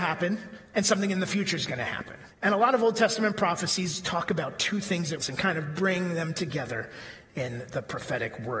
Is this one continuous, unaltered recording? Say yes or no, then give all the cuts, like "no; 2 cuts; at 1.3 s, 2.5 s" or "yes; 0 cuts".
no; 2 cuts; at 2.3 s, 5.2 s